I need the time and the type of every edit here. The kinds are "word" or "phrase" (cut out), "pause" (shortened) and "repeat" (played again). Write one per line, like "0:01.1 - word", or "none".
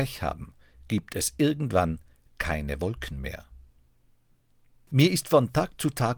none